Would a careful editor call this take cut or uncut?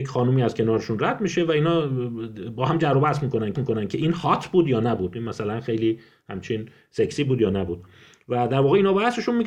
cut